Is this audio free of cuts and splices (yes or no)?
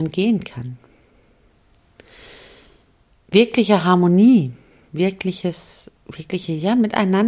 no